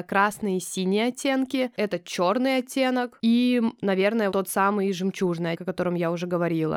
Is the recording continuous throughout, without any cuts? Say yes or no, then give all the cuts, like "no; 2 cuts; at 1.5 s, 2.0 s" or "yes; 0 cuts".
no; 2 cuts; at 4.3 s, 5.5 s